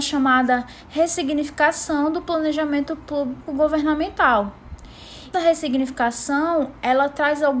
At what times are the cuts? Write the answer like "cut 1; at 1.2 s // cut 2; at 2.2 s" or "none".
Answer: cut 1; at 3.5 s // cut 2; at 5.3 s